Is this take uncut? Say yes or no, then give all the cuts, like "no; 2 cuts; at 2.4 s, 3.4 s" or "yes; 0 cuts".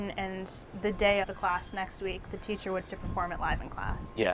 no; 2 cuts; at 1.2 s, 2.9 s